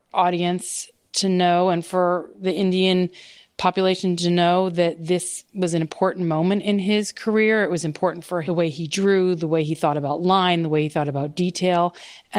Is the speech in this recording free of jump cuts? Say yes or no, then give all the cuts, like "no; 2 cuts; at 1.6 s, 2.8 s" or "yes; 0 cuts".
yes; 0 cuts